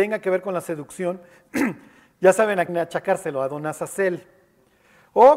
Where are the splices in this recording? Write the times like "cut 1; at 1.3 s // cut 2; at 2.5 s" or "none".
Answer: cut 1; at 2.7 s